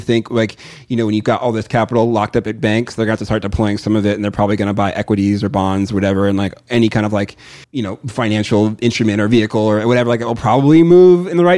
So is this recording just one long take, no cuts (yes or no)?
no